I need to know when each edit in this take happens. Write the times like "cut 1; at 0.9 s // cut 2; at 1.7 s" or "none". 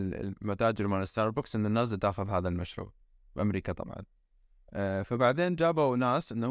none